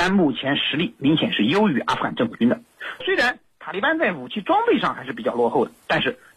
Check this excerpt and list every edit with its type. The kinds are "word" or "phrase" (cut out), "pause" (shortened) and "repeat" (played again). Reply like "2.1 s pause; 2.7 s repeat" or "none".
3.0 s word